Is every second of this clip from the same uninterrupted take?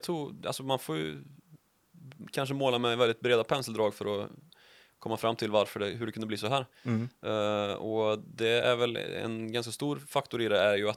yes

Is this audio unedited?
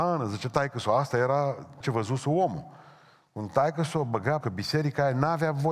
no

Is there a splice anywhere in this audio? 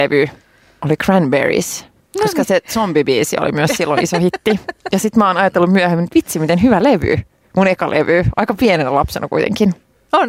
no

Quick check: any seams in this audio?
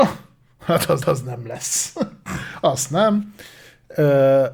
yes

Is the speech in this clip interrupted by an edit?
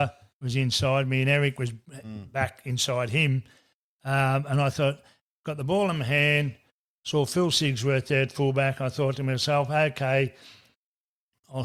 no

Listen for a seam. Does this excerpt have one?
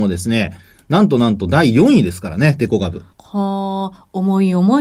yes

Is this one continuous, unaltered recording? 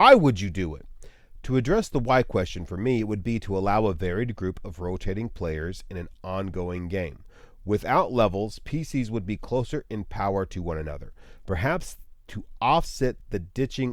yes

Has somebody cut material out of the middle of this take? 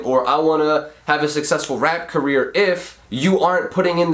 yes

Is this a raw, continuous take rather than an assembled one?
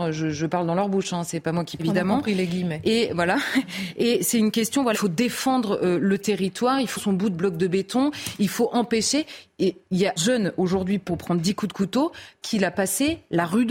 no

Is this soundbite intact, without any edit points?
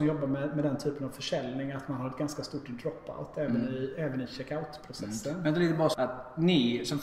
no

